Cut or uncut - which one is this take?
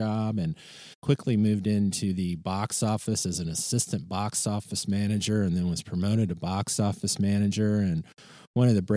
cut